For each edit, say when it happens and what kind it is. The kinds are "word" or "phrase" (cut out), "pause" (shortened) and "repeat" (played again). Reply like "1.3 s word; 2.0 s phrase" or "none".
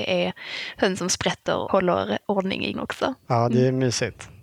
1.7 s word; 2.7 s word